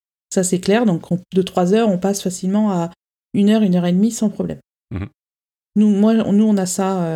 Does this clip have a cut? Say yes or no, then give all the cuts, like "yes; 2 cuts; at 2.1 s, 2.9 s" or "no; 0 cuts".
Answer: no; 0 cuts